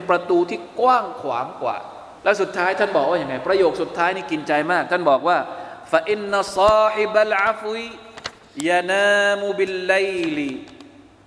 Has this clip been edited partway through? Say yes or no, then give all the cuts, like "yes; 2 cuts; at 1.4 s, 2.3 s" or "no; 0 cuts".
yes; 1 cut; at 2.2 s